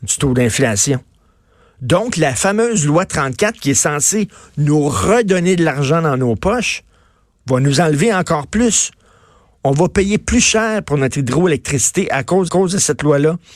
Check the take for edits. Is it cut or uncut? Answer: cut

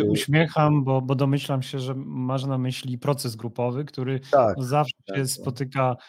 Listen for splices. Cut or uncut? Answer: uncut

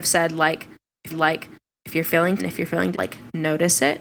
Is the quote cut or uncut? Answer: cut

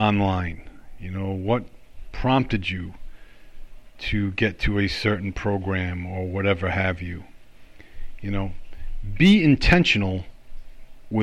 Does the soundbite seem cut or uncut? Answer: uncut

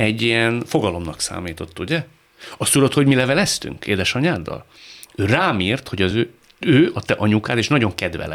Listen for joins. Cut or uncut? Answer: uncut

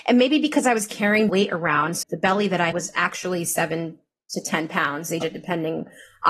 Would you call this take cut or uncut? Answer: cut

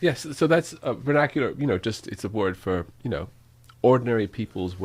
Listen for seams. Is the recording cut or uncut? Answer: uncut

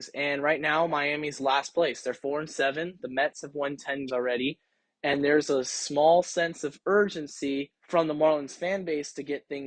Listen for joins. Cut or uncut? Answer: cut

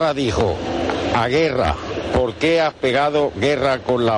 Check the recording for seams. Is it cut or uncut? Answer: uncut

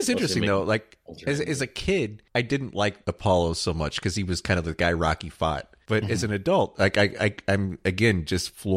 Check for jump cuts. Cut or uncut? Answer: cut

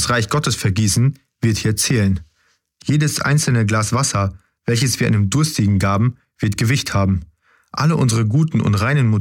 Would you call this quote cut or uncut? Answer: uncut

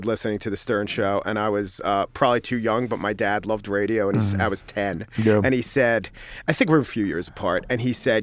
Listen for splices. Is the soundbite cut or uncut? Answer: uncut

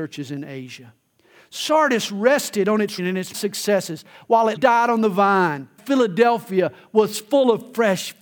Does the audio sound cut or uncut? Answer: cut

